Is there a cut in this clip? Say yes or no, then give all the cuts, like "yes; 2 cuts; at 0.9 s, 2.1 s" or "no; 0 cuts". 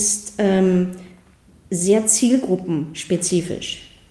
no; 0 cuts